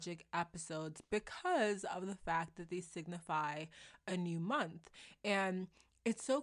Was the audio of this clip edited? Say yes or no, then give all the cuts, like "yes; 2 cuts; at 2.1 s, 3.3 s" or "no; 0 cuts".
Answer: no; 0 cuts